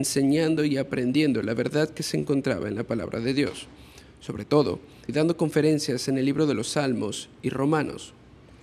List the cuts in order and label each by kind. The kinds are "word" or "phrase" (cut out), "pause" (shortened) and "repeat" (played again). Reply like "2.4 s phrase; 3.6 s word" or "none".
5.1 s word

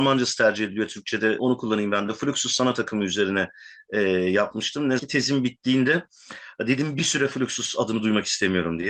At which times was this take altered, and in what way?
1.4 s word; 5.0 s word

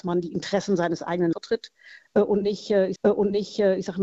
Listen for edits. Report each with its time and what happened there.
1.3 s word; 3.0 s repeat

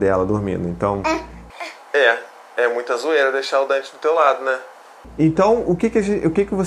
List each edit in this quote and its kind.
none

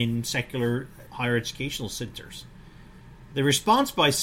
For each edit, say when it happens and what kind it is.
1.1 s word

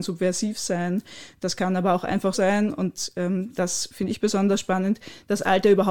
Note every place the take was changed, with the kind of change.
2.3 s word

